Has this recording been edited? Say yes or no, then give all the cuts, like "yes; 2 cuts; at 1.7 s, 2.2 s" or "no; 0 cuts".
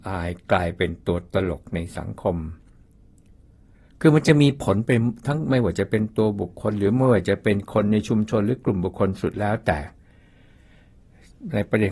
no; 0 cuts